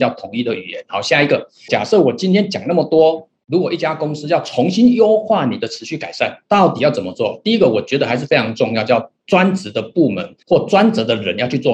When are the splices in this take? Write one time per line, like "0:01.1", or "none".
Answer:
0:10.4